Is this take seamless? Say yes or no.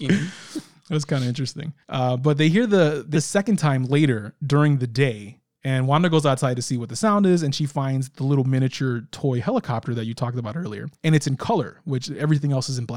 no